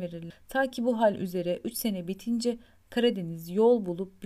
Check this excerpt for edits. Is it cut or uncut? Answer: uncut